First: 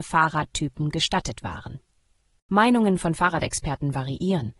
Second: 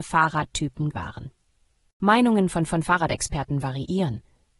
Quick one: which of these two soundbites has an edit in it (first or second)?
second